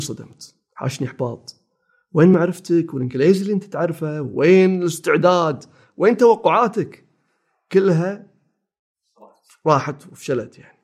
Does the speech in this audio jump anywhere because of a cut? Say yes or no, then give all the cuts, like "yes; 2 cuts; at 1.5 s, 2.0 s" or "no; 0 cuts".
no; 0 cuts